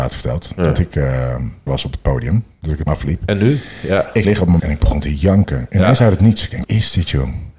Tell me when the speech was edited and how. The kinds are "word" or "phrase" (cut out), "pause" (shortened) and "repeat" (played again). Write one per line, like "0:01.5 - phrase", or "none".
0:01.7 - word
0:02.9 - word
0:04.2 - word
0:04.6 - word
0:06.6 - word